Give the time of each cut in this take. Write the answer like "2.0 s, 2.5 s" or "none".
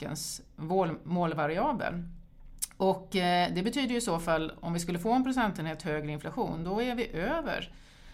none